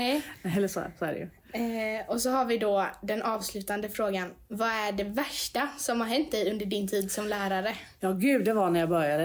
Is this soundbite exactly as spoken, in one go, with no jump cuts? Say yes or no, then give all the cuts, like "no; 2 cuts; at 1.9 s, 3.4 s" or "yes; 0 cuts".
yes; 0 cuts